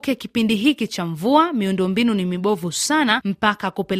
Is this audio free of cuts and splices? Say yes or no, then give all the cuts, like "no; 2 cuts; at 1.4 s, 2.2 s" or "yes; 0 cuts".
yes; 0 cuts